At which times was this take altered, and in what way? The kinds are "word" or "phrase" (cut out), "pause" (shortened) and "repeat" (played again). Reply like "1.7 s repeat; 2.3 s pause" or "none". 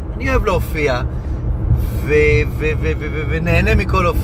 none